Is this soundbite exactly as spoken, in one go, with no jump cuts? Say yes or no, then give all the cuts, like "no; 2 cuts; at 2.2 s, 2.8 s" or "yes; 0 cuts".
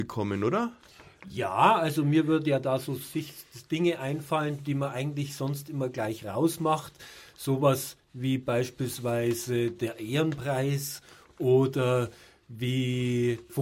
yes; 0 cuts